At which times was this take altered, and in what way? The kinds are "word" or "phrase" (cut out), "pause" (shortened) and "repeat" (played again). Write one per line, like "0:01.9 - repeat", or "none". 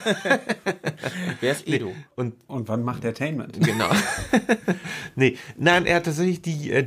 0:02.1 - pause